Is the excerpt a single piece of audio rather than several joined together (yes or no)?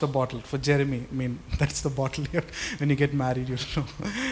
yes